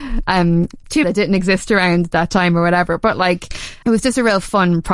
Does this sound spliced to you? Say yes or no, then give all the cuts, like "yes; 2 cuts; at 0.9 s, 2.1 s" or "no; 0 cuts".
yes; 2 cuts; at 1.0 s, 3.8 s